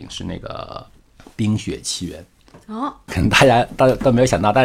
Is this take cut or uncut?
cut